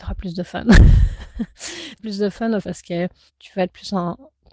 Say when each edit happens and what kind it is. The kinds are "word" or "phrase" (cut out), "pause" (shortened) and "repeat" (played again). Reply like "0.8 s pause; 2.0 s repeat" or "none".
2.0 s word; 2.6 s word; 3.3 s word